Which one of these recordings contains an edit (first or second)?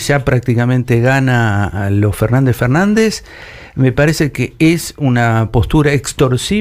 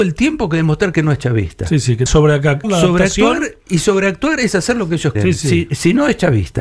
second